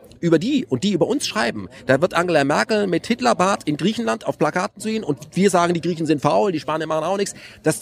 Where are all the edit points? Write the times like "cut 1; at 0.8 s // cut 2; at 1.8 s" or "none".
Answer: none